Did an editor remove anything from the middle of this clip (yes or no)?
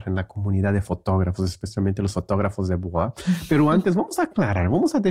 no